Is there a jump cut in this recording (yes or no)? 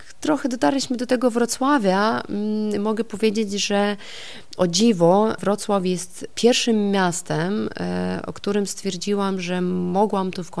no